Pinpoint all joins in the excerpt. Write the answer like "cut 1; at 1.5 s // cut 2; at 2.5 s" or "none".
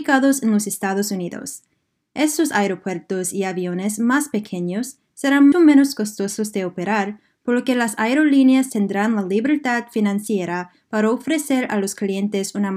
cut 1; at 5.5 s